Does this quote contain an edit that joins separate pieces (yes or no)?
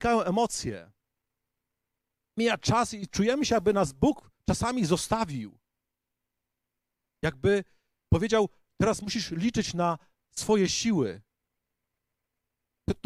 no